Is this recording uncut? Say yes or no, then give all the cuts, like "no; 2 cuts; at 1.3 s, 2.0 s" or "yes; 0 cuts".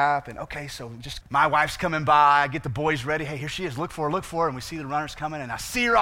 no; 1 cut; at 1.2 s